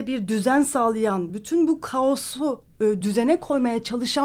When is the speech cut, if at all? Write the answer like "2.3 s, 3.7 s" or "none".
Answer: none